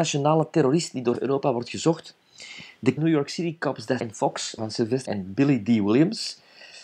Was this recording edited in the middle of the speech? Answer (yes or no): yes